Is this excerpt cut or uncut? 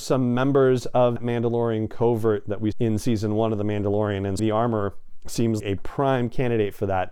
cut